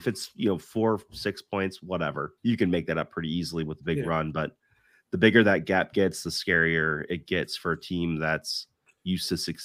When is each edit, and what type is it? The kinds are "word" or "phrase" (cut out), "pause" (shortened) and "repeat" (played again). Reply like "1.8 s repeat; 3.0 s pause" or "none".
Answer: 2.4 s pause